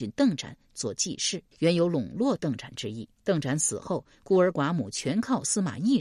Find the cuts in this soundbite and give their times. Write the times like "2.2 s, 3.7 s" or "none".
1.5 s, 3.1 s